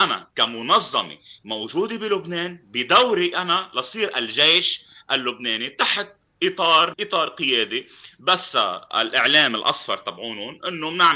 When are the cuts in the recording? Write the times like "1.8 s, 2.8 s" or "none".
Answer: 6.9 s